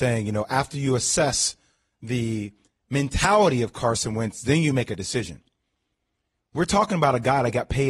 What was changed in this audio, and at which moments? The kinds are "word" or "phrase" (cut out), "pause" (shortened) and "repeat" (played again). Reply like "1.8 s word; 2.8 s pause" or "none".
none